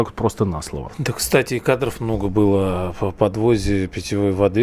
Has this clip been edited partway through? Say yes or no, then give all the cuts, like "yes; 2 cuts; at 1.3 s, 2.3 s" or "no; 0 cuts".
no; 0 cuts